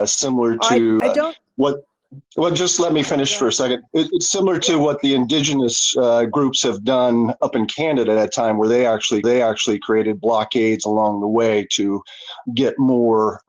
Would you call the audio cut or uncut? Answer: cut